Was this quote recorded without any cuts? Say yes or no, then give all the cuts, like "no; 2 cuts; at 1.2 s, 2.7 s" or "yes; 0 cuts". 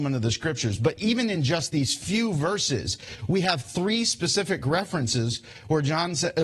yes; 0 cuts